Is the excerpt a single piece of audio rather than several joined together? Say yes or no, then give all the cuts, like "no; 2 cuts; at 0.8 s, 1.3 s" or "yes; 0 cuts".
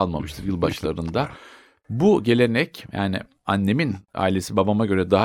yes; 0 cuts